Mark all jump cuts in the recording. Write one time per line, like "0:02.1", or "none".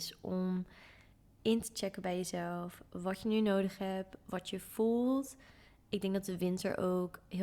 none